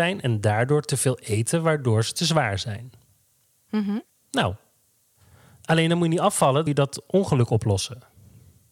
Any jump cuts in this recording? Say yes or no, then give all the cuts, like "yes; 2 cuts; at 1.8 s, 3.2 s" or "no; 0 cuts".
yes; 1 cut; at 6.7 s